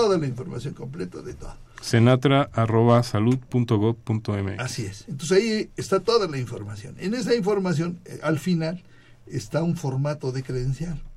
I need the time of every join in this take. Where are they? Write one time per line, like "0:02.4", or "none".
none